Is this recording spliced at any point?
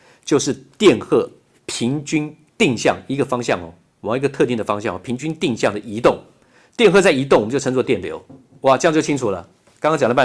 no; 0 cuts

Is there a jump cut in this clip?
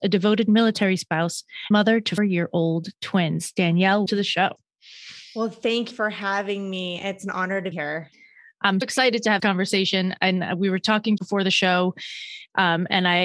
yes; 8 cuts; at 1.7 s, 2.2 s, 4.1 s, 5.9 s, 7.7 s, 8.8 s, 9.4 s, 11.2 s

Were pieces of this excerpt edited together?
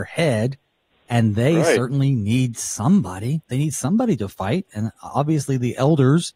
no; 0 cuts

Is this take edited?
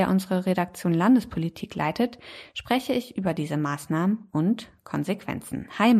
no; 0 cuts

